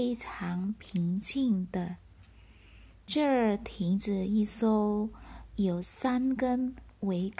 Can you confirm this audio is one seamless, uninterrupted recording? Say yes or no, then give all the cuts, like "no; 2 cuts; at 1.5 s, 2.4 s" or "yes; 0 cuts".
yes; 0 cuts